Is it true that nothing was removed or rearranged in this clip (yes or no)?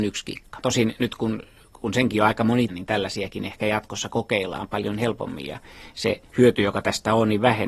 no